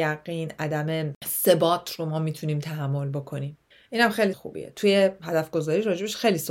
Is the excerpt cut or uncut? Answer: cut